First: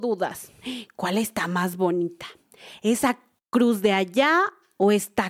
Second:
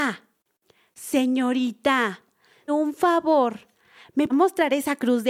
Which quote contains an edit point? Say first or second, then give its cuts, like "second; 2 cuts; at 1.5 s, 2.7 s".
second; 2 cuts; at 2.7 s, 4.3 s